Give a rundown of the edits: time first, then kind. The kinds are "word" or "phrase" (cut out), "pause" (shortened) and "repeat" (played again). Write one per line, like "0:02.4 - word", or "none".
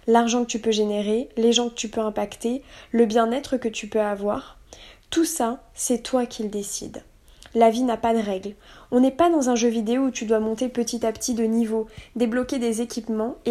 none